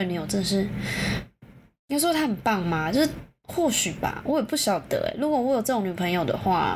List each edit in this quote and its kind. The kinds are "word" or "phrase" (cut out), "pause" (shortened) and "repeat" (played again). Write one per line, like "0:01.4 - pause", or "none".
none